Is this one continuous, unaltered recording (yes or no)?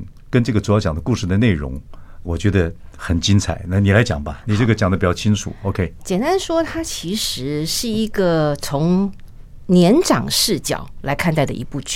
no